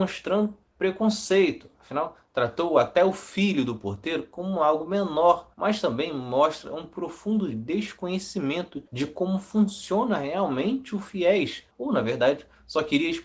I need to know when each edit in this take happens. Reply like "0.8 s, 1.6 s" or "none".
5.5 s, 8.9 s, 11.7 s